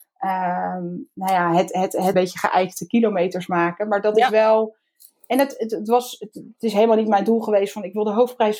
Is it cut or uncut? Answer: cut